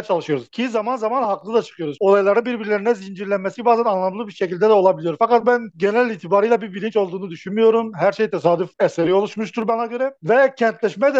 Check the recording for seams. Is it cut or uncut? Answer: uncut